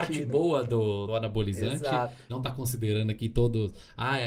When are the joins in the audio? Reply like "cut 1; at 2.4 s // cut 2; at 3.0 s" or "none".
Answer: cut 1; at 1.1 s // cut 2; at 2.3 s